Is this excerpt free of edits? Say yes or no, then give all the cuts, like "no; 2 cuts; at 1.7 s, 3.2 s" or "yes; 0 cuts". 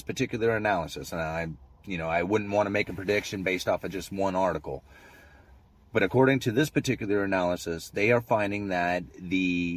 yes; 0 cuts